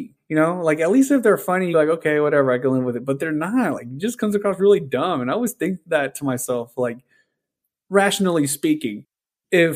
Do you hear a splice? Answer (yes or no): yes